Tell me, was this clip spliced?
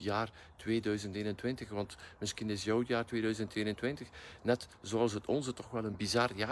no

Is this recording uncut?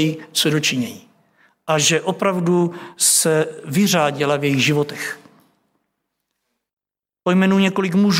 yes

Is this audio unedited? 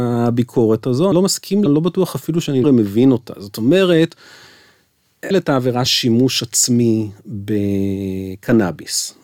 no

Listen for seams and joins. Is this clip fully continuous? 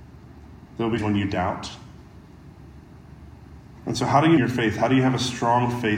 no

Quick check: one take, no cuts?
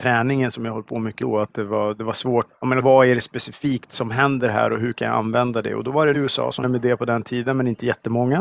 no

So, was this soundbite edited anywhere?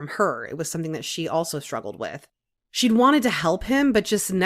no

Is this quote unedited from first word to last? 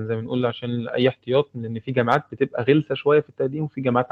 yes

